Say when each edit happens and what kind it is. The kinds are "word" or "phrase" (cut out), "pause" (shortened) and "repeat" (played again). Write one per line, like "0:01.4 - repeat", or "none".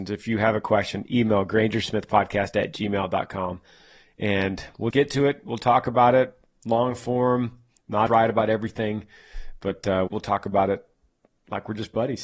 0:04.9 - word
0:08.1 - word
0:10.1 - word